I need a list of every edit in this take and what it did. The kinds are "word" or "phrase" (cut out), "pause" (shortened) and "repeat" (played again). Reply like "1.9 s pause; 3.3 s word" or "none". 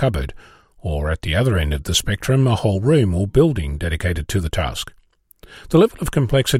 none